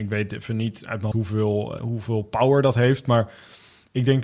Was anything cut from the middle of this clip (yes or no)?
yes